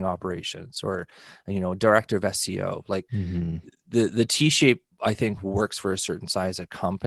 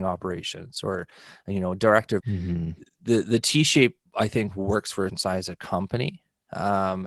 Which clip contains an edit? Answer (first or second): second